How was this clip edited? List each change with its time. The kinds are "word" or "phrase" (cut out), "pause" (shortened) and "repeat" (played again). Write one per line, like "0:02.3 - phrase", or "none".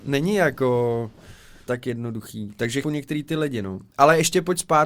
0:01.7 - word
0:02.8 - word